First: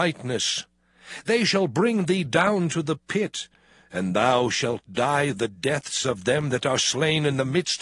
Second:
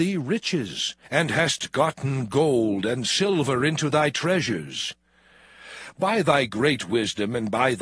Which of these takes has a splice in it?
second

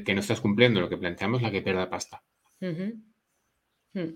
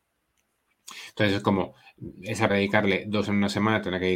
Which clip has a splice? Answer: second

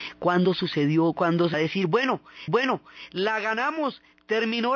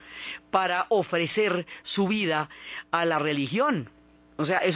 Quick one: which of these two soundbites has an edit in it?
first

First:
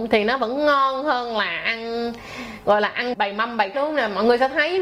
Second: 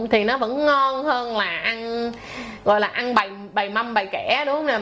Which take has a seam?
first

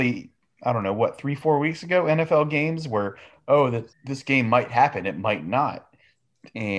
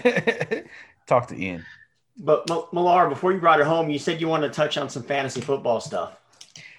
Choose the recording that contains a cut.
first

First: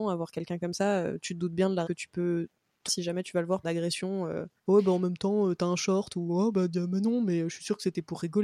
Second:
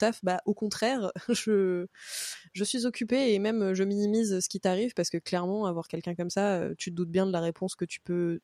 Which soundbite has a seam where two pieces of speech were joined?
first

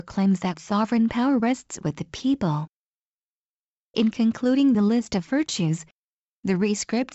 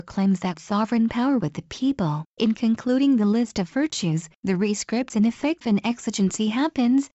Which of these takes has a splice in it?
second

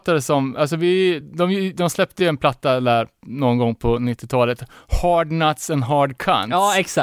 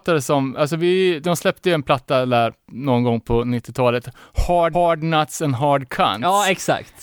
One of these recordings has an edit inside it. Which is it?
second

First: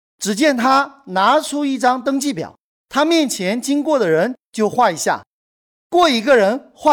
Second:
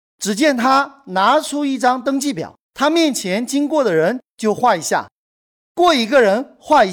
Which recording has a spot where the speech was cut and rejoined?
second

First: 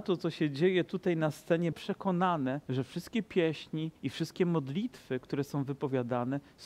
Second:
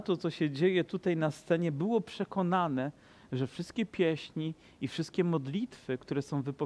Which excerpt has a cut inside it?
first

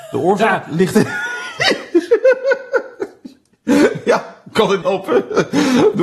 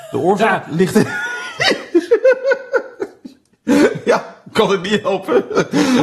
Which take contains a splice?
first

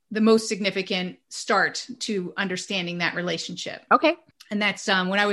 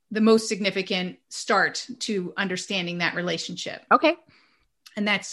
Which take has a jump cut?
first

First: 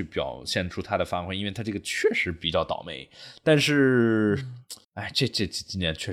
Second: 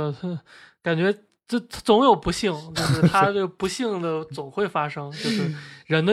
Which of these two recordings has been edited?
first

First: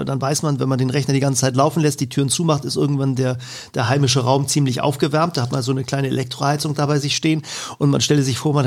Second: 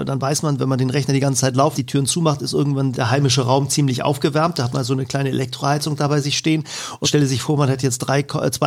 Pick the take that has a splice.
second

